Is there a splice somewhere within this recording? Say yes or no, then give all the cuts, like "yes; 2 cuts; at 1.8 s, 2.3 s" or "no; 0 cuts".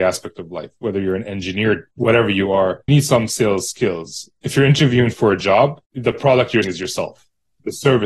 yes; 5 cuts; at 1.9 s, 2.9 s, 4.4 s, 5.8 s, 6.6 s